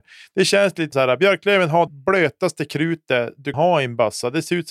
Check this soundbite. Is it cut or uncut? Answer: cut